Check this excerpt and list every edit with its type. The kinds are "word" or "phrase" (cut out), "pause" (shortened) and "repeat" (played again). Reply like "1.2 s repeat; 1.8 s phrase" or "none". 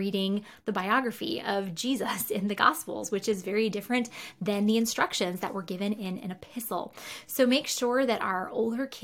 none